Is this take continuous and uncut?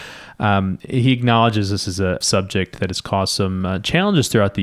no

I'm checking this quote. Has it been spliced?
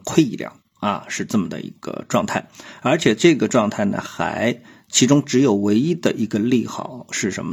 no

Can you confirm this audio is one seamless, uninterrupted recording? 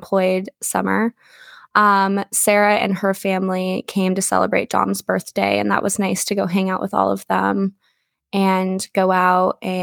yes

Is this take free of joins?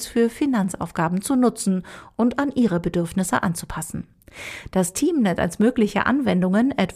yes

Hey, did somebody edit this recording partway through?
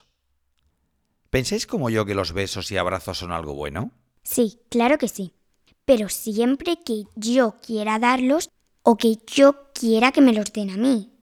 no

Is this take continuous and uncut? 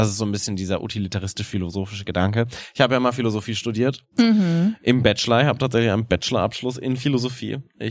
yes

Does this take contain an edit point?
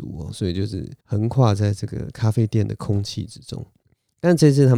yes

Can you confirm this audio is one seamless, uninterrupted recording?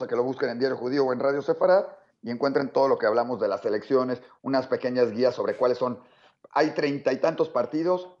yes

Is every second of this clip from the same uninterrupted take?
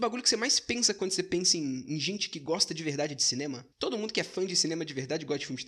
no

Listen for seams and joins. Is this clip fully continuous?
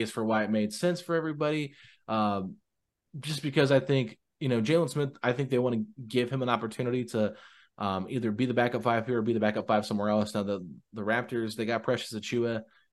yes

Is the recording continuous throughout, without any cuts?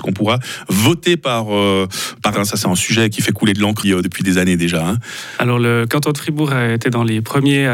no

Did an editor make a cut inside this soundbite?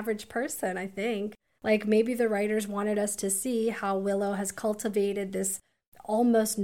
no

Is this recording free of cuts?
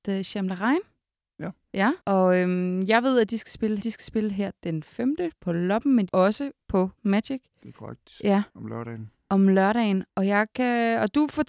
no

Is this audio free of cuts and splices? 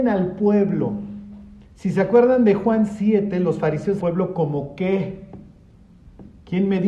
no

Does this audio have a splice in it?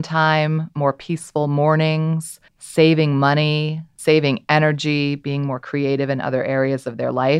yes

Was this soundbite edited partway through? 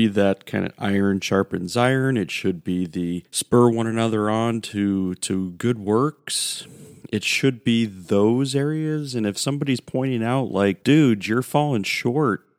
yes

